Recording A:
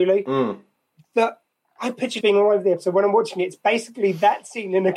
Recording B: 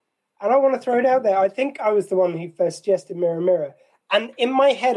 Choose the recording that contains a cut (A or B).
A